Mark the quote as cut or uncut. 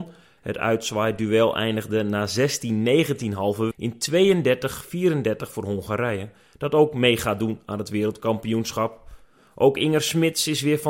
cut